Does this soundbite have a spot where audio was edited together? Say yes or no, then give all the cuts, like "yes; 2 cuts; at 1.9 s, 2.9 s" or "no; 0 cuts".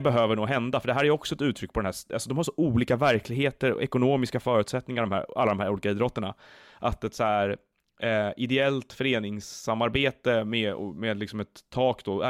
no; 0 cuts